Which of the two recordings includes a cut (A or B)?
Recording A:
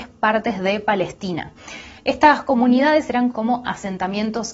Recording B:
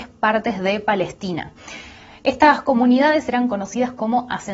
A